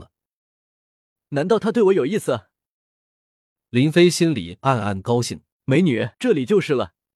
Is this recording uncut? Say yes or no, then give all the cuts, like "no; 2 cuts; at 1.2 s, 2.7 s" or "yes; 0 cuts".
no; 2 cuts; at 5.5 s, 6.1 s